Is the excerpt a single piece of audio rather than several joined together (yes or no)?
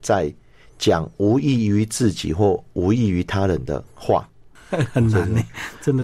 no